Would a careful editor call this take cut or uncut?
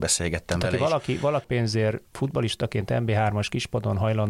cut